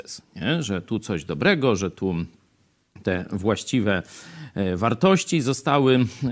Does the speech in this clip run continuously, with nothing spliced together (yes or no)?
yes